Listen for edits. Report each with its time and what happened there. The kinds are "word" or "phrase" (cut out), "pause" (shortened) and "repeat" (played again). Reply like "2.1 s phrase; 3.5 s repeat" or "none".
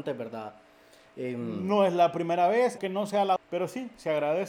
2.8 s word; 3.4 s word